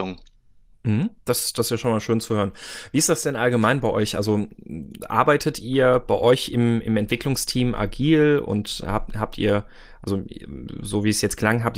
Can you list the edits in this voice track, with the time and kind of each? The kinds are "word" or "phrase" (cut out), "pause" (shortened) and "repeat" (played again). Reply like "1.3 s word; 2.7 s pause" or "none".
1.2 s pause

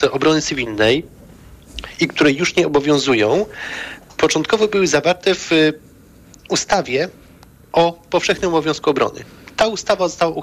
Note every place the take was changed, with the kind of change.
none

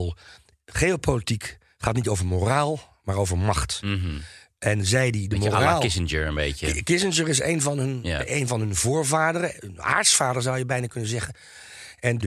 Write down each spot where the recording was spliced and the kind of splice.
none

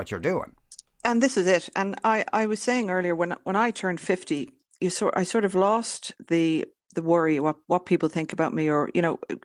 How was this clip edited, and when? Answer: none

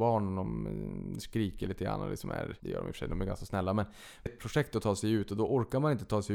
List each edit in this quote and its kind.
2.6 s word; 4.3 s word

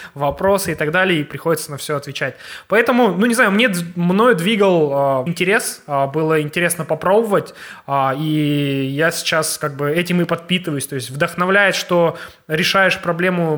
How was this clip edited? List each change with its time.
5.3 s word

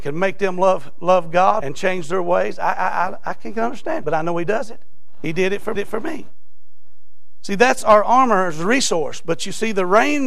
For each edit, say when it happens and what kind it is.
1.6 s word; 4.0 s word; 5.8 s repeat

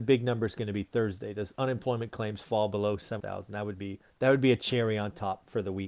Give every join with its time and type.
3.2 s word; 4.1 s pause

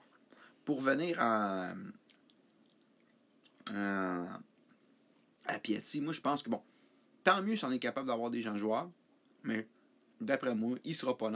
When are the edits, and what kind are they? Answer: none

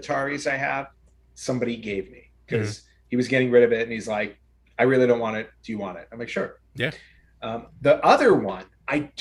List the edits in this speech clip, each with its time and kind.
none

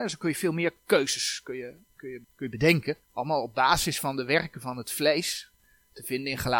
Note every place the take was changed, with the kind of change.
2.2 s pause; 3.0 s pause

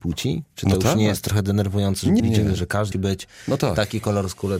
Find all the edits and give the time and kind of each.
2.2 s phrase; 2.9 s word

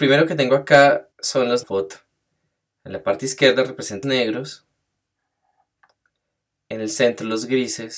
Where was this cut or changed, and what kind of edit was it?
1.1 s pause; 1.6 s phrase; 4.0 s word

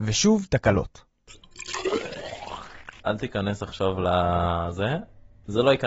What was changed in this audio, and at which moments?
none

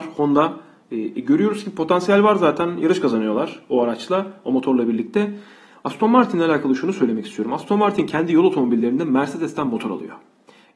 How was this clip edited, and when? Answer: none

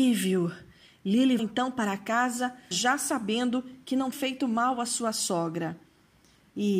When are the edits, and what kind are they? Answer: 1.4 s word; 2.7 s word; 4.1 s word

